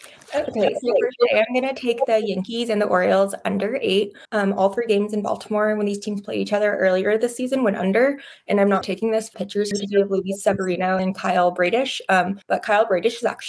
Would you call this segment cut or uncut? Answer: cut